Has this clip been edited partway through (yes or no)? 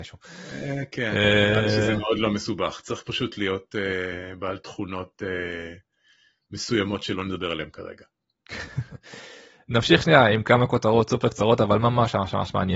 no